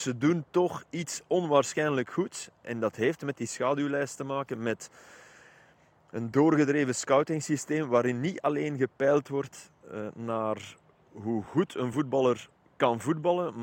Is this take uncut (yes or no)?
yes